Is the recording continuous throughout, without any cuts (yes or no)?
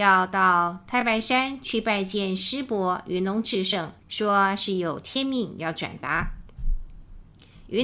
no